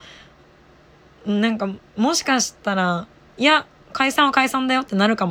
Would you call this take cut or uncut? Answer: uncut